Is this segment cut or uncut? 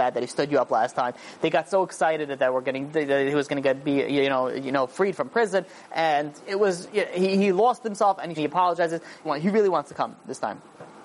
cut